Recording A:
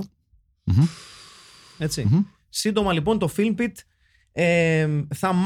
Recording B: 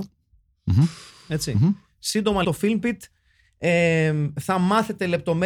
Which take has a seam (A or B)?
B